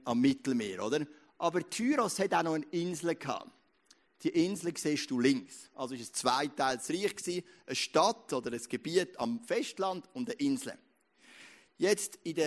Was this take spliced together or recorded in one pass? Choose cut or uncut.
uncut